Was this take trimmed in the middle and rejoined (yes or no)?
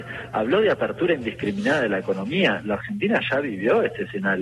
no